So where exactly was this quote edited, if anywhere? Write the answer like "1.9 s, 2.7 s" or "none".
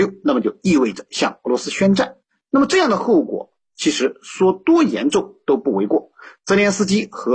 none